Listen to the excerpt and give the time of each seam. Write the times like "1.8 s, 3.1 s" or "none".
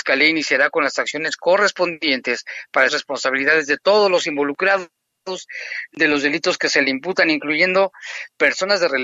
2.9 s